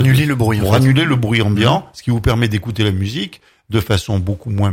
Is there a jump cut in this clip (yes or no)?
no